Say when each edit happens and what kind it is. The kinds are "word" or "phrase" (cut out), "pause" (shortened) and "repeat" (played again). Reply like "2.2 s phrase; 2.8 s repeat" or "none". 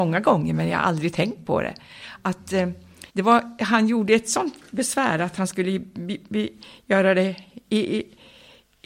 3.1 s pause